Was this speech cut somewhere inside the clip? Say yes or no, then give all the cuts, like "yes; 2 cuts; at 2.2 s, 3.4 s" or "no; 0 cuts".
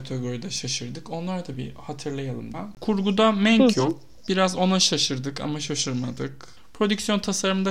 yes; 2 cuts; at 1.5 s, 2.5 s